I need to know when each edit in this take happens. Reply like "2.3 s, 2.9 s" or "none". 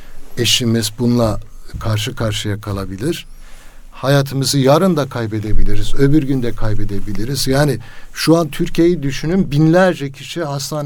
none